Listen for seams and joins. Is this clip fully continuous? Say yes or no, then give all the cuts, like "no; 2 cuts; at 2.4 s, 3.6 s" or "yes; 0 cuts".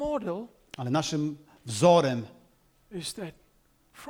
yes; 0 cuts